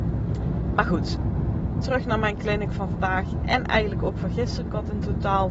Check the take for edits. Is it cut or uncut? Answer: cut